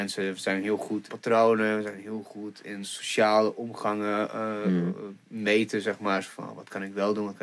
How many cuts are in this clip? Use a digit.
2